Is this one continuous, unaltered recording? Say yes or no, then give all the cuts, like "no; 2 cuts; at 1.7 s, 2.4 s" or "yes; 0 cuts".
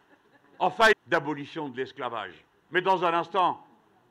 no; 1 cut; at 0.9 s